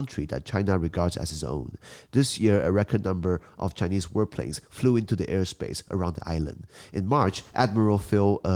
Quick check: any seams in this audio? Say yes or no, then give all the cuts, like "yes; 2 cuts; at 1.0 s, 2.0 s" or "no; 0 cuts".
no; 0 cuts